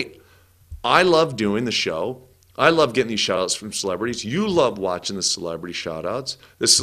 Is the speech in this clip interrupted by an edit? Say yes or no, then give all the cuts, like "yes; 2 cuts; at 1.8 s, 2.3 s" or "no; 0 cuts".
no; 0 cuts